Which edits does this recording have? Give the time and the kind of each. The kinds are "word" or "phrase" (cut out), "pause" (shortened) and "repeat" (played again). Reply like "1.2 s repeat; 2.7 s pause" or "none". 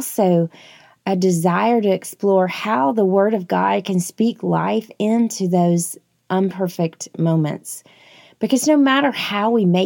none